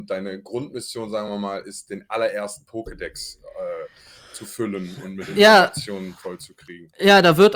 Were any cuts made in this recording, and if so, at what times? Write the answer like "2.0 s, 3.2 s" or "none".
none